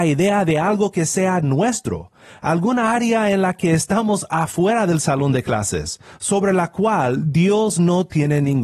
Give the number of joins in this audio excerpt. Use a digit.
0